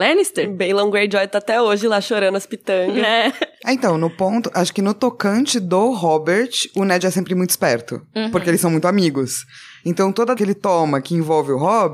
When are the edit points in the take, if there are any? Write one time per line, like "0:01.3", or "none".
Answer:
0:10.4